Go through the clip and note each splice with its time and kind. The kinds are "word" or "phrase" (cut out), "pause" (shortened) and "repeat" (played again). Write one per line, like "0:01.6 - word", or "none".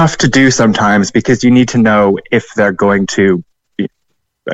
none